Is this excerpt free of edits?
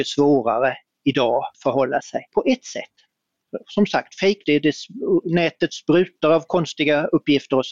no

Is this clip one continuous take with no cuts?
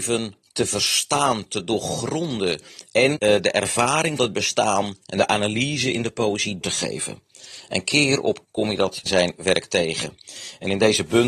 no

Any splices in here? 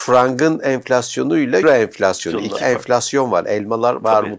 yes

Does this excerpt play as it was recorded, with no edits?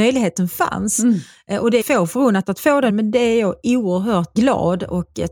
no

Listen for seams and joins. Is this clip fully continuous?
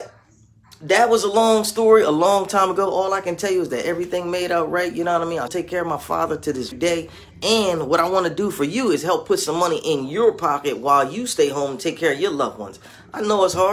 no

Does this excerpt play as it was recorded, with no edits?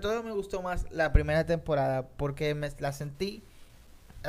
yes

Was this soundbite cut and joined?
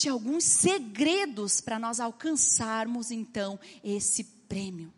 no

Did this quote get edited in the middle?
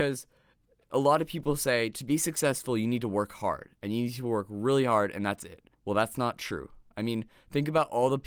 yes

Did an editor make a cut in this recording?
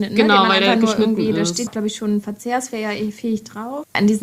yes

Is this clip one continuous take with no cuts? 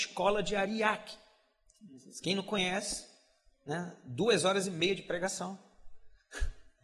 yes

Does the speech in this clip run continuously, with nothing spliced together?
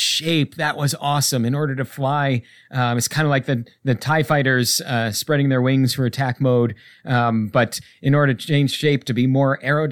yes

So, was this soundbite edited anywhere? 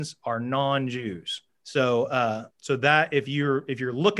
yes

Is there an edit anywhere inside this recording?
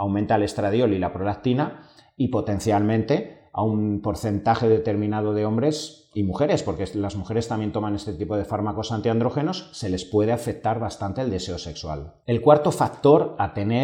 no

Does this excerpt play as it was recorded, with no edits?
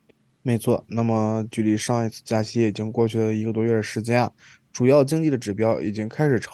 yes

